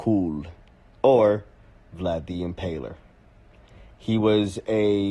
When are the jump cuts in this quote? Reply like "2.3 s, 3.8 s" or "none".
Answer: none